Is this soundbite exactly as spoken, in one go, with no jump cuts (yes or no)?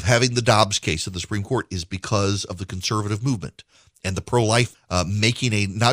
no